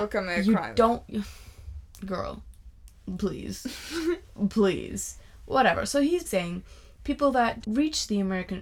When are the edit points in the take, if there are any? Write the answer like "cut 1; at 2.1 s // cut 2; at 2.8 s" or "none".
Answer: cut 1; at 6.2 s // cut 2; at 7.6 s